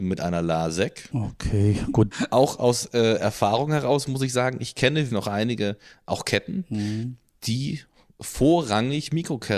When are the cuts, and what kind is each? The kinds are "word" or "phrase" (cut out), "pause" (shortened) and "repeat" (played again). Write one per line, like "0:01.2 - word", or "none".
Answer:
0:05.1 - word